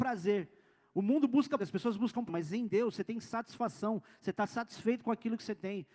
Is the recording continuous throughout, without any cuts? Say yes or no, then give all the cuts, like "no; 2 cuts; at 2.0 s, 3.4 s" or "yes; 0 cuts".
no; 2 cuts; at 1.6 s, 2.3 s